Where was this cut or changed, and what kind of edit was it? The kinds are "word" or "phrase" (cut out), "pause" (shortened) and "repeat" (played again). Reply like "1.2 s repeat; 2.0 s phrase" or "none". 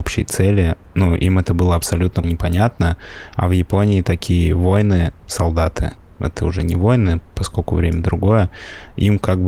2.2 s word; 5.2 s word